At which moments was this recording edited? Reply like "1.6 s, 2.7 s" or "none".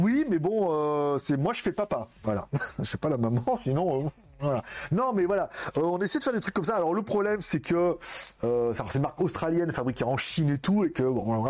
none